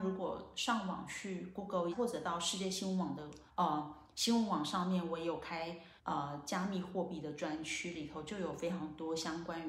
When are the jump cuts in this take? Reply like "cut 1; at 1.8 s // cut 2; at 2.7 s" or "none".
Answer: cut 1; at 1.9 s // cut 2; at 3.5 s // cut 3; at 6.0 s